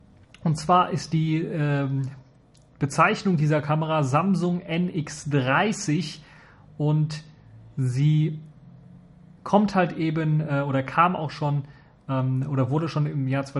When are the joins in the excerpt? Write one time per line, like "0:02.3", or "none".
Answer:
none